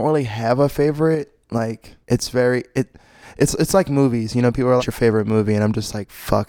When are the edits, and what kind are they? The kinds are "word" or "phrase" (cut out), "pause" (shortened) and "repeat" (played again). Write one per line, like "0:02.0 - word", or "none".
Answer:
0:02.0 - pause
0:04.8 - phrase